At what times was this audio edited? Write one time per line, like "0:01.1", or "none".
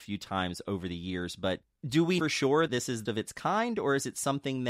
0:02.2
0:02.7
0:03.1